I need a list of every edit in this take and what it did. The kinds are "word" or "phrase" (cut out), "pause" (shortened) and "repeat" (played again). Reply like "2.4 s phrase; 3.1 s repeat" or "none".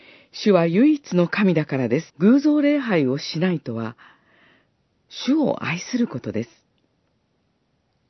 2.1 s pause